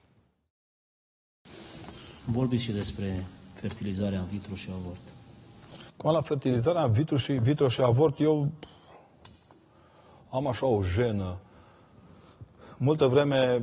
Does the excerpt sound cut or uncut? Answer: uncut